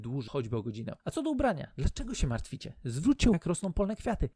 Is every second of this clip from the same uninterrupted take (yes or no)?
no